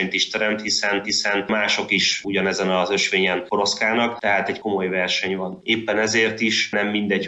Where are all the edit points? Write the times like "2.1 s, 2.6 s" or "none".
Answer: 1.0 s

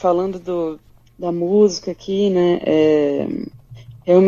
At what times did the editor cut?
1.0 s

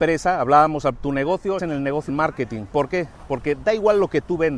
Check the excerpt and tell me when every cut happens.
1.0 s, 1.6 s, 2.1 s

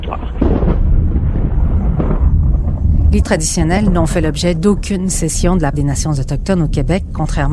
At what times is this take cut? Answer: 3.2 s, 5.7 s

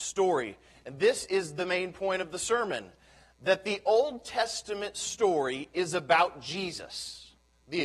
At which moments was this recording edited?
none

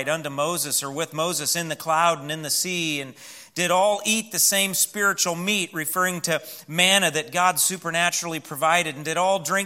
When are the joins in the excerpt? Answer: none

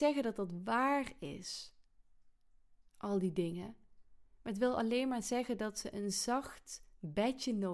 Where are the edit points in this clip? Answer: none

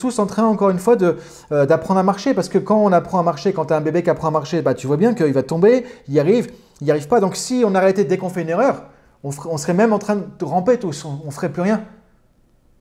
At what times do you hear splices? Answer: none

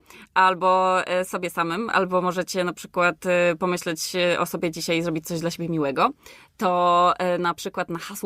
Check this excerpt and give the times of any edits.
none

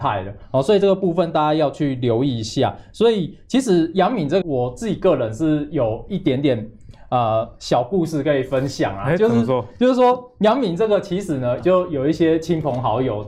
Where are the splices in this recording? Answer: 4.4 s, 11.6 s

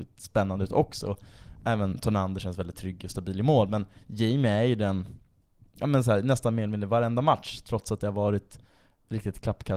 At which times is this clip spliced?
none

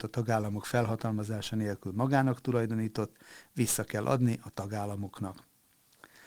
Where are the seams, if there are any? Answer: none

